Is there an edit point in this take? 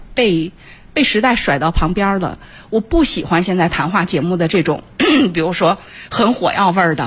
no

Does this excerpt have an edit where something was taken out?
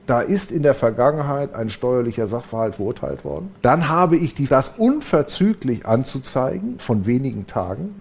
yes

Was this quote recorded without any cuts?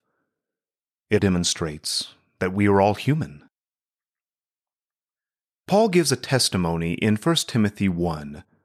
no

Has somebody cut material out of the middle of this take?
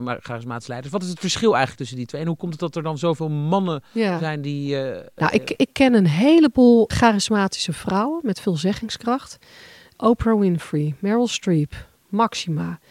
no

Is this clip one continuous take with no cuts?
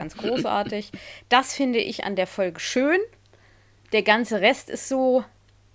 yes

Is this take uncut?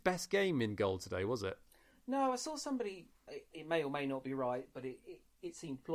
no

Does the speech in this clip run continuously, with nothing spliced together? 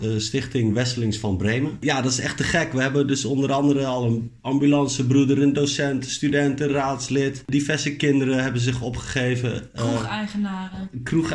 yes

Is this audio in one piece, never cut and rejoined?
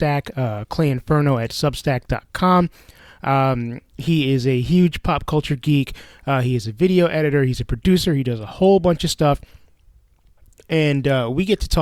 yes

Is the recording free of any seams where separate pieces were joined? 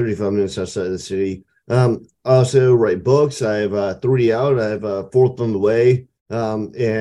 yes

